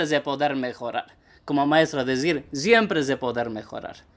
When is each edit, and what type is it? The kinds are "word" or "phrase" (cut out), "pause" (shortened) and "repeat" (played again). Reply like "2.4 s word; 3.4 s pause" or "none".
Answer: none